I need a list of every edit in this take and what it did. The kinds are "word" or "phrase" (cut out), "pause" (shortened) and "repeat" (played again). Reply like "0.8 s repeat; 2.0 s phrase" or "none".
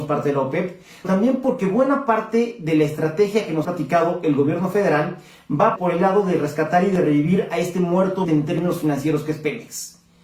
1.0 s word; 3.6 s word; 5.8 s word; 8.2 s word